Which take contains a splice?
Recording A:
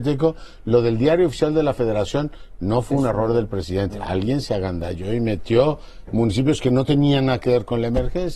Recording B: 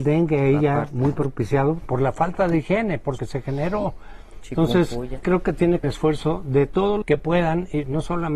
B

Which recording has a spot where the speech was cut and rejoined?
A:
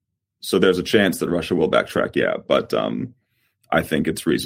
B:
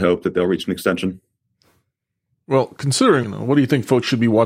B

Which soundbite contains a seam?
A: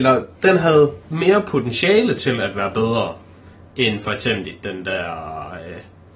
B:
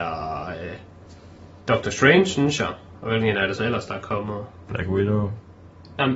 B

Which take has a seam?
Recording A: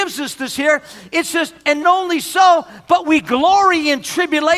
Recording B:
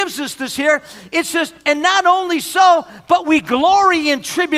A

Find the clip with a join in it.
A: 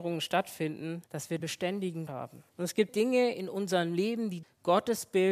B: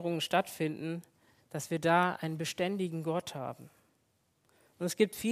A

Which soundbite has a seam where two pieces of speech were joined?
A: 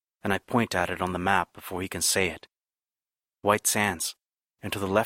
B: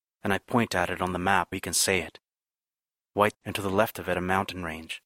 B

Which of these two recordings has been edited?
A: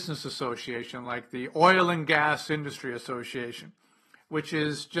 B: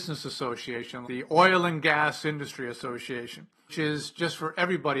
B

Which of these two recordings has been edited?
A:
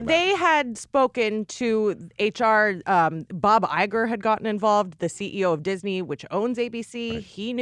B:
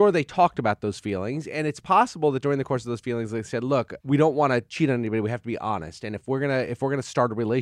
B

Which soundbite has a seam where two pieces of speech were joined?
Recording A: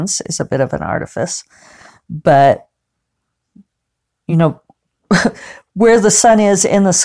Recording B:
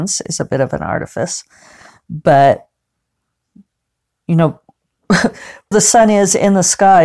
B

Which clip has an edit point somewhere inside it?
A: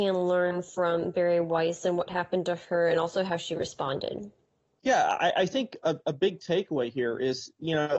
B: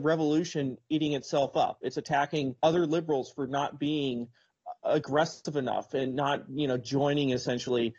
B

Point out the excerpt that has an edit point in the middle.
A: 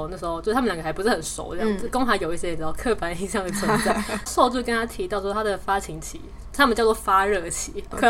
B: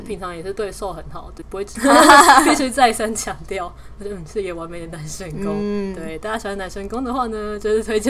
B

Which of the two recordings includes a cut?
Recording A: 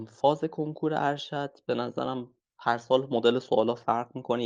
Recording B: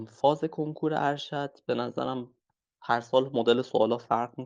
A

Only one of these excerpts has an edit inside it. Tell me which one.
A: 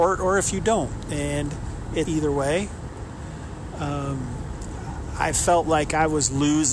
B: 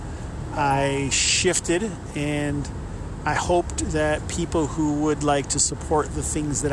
A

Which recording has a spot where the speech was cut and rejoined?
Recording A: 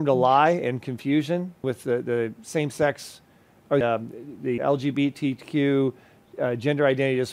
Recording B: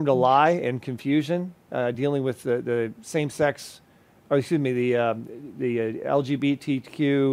A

